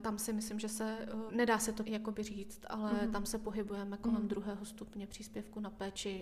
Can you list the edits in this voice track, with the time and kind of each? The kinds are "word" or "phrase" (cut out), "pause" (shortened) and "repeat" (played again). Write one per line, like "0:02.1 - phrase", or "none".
0:01.3 - word
0:01.8 - word